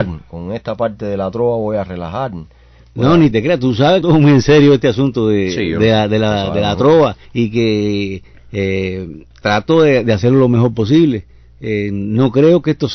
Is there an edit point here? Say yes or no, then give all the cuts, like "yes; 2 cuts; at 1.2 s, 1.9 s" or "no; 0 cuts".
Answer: yes; 4 cuts; at 3.3 s, 4.0 s, 7.3 s, 9.4 s